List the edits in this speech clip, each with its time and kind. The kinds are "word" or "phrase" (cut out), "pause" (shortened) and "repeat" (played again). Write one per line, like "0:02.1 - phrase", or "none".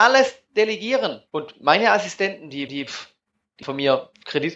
0:01.3 - pause
0:02.7 - repeat
0:03.6 - word